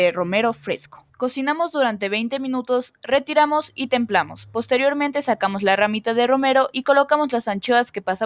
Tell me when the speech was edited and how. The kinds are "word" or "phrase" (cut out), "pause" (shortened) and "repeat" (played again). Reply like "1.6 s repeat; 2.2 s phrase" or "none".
1.1 s pause